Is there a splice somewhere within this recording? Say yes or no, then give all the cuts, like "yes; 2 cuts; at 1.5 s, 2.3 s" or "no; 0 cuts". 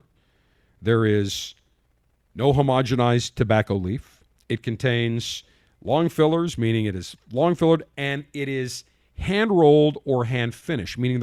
no; 0 cuts